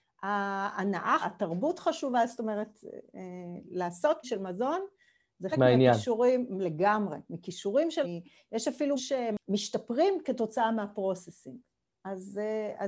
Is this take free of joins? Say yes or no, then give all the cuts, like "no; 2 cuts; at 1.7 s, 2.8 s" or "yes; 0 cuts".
no; 5 cuts; at 1.2 s, 4.2 s, 5.5 s, 8.0 s, 9.0 s